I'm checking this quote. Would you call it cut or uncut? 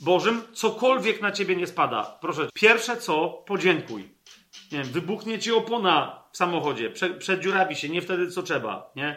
cut